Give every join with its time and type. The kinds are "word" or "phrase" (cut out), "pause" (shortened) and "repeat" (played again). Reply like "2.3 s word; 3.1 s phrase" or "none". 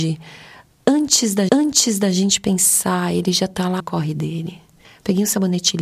1.5 s repeat; 3.8 s phrase; 4.8 s pause